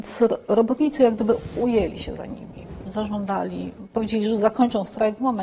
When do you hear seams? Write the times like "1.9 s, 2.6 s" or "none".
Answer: none